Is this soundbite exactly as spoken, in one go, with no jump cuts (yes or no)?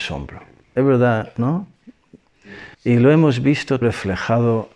no